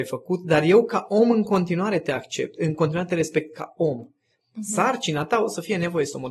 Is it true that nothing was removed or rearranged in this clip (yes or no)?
yes